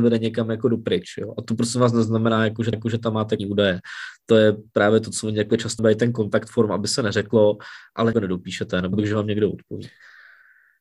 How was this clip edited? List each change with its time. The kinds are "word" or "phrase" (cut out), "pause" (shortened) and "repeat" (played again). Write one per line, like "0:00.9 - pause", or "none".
0:02.7 - repeat
0:03.4 - word
0:05.8 - phrase
0:08.1 - phrase
0:08.9 - word